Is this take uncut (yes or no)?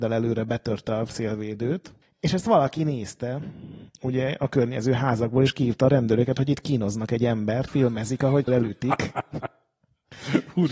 no